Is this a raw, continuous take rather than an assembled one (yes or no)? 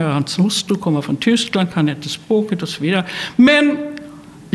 yes